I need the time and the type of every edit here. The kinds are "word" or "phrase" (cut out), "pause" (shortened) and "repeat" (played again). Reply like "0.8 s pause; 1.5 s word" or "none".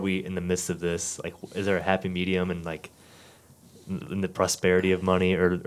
none